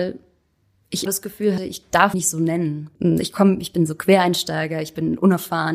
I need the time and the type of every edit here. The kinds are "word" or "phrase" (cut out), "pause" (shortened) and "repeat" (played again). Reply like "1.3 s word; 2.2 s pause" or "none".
1.1 s word; 1.6 s word; 2.1 s word; 3.0 s pause